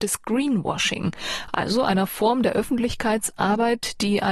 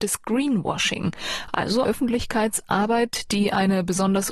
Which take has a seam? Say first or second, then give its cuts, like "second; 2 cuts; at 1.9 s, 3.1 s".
second; 1 cut; at 1.8 s